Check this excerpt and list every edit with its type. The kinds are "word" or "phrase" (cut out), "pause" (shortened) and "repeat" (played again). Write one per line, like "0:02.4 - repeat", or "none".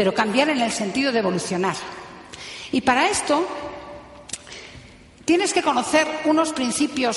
none

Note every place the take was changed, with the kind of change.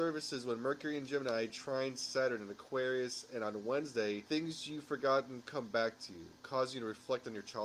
none

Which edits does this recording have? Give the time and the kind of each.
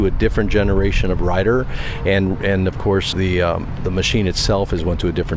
0:03.1 - word

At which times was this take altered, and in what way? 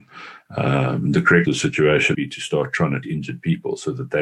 0:01.4 - word
0:02.1 - word
0:03.0 - word

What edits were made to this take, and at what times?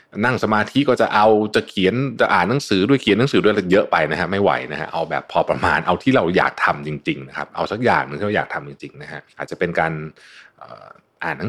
0:09.3 - pause

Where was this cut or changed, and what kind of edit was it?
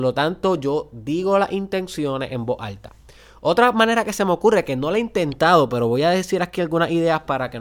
none

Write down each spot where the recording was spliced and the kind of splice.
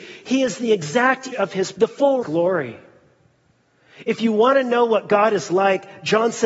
0:01.3 - word
0:01.7 - word
0:02.2 - phrase

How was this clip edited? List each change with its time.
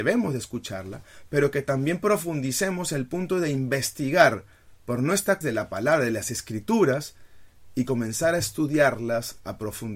0:05.4 - phrase

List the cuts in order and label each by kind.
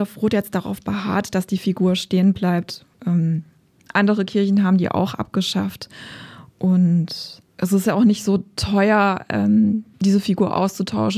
0:02.9 - pause
0:07.5 - pause
0:09.9 - pause

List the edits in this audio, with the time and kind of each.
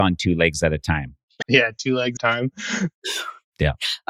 0:01.4 - word
0:02.2 - phrase

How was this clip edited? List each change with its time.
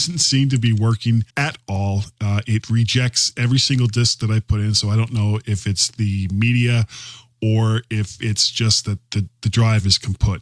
0:01.3 - pause

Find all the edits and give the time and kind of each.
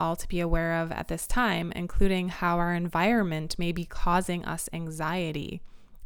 none

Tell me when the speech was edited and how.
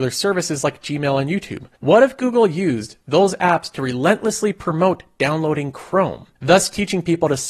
0:01.7 - pause
0:06.4 - pause

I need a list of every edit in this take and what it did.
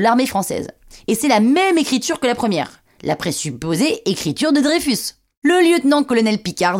none

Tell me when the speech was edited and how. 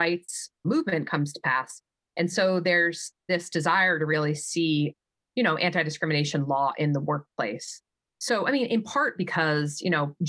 none

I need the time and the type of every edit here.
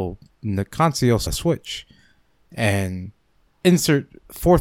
0:01.3 - word
0:03.5 - pause

